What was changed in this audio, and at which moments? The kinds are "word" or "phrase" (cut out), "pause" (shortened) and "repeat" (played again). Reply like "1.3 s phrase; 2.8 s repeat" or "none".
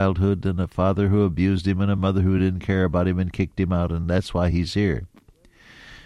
none